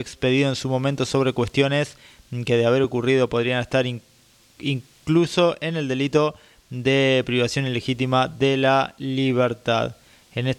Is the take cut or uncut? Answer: uncut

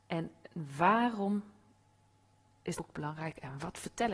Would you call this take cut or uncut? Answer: cut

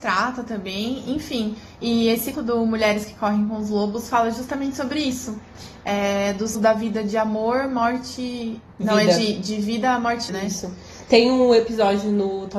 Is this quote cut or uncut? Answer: cut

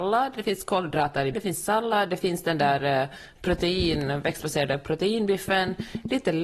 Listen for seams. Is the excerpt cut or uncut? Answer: cut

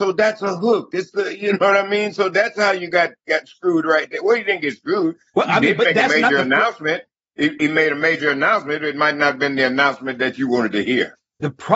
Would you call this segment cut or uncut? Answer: uncut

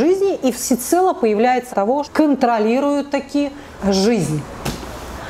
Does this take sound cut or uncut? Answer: cut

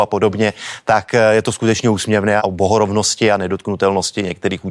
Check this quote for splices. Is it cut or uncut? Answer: cut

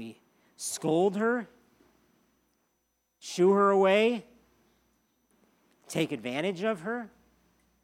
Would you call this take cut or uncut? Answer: uncut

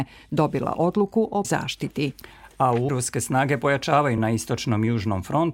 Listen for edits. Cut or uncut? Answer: cut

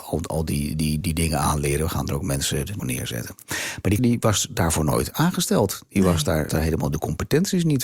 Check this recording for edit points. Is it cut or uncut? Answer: cut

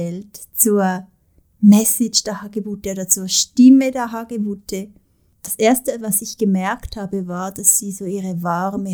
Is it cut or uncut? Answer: uncut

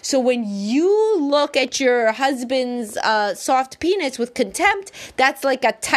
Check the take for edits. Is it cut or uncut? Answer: uncut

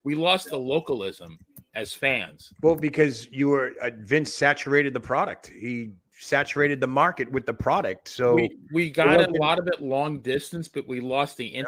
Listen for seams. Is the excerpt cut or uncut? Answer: uncut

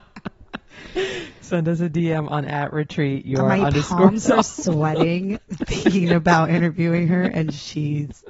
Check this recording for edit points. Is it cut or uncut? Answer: uncut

